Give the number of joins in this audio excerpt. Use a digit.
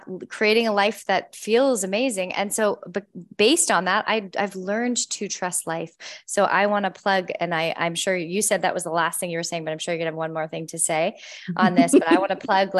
0